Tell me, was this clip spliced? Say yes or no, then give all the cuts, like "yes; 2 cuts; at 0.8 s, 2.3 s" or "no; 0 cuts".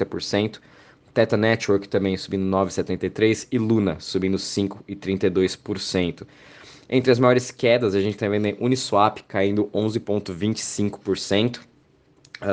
no; 0 cuts